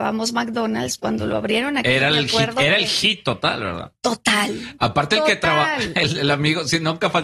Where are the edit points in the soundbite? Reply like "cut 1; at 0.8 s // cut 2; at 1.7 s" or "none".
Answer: cut 1; at 1.0 s